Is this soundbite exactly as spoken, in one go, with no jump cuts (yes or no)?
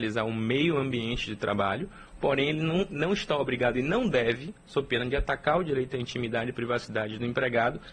yes